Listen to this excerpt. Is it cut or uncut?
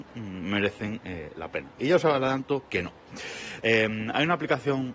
uncut